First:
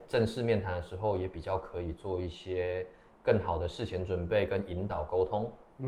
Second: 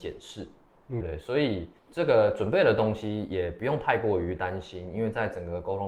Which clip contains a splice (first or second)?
second